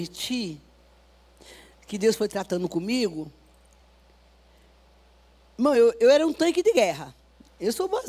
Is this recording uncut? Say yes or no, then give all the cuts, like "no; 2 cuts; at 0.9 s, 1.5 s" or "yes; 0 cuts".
yes; 0 cuts